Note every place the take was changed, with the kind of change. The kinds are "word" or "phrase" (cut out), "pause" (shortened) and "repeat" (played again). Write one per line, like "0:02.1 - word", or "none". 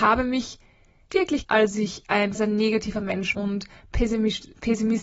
0:01.1 - word
0:01.4 - word
0:02.3 - word
0:03.3 - word